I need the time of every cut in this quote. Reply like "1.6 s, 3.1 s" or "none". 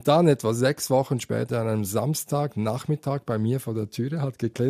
1.5 s